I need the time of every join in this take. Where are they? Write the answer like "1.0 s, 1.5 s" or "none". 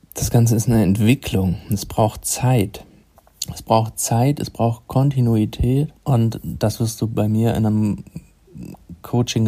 6.0 s